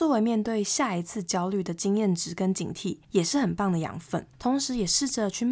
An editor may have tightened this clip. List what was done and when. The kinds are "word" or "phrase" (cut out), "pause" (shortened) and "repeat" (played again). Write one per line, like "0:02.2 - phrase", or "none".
0:03.0 - pause
0:04.3 - pause